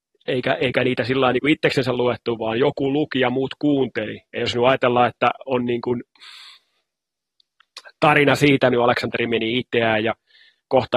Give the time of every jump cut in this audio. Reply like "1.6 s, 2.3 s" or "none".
8.7 s